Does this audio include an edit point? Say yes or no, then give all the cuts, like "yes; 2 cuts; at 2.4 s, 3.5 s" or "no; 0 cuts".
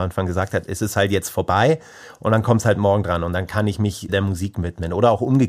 yes; 1 cut; at 4.1 s